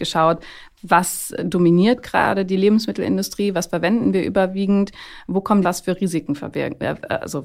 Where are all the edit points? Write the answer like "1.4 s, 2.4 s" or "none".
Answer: 5.6 s